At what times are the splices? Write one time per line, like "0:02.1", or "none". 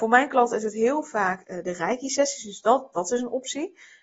none